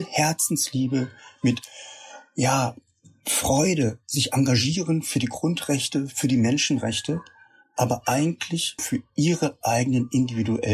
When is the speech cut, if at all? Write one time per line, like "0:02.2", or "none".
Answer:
0:08.8